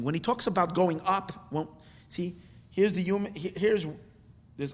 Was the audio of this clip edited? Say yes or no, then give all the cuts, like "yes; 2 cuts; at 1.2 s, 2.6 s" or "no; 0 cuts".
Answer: no; 0 cuts